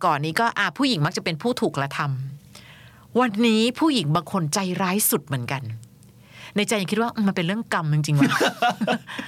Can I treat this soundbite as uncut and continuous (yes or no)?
yes